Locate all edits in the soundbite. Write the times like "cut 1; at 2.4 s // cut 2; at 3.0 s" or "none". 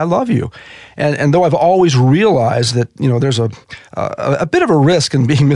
cut 1; at 3.9 s